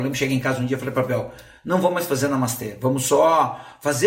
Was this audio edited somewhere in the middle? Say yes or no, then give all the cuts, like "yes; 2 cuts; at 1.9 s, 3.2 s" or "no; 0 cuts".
no; 0 cuts